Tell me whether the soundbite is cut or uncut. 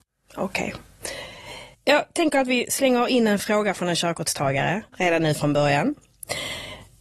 cut